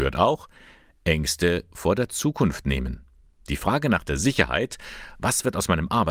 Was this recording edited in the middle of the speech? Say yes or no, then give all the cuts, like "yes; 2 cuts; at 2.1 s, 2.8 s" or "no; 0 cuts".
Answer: no; 0 cuts